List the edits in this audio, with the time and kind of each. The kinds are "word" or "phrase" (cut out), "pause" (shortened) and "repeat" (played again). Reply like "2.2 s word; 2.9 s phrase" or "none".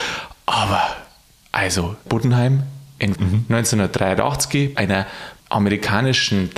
2.1 s phrase; 3.2 s word; 4.8 s word; 5.4 s pause